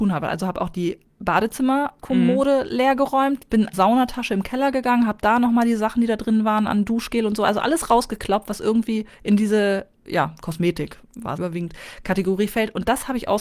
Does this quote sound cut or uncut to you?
cut